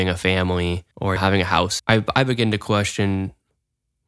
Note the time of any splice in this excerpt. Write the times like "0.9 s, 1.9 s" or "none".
0.9 s